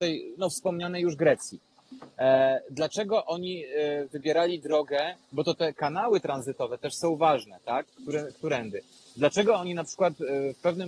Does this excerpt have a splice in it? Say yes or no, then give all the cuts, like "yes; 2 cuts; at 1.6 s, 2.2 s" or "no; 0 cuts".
no; 0 cuts